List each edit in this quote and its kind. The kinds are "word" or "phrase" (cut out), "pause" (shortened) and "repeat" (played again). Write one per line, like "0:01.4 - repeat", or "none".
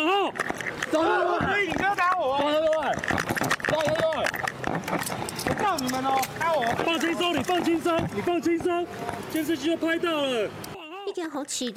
none